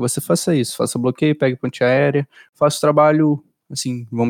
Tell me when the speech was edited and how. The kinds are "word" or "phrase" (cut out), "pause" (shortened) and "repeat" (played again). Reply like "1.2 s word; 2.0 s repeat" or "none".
none